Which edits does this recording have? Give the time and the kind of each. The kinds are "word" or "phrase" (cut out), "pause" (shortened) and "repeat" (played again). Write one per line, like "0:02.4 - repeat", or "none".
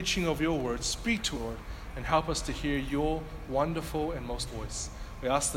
0:01.3 - word
0:04.5 - word